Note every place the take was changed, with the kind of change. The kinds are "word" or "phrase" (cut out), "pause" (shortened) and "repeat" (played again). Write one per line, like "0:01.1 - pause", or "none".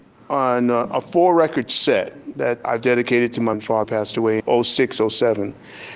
0:02.6 - word
0:03.5 - word
0:03.8 - word
0:04.4 - word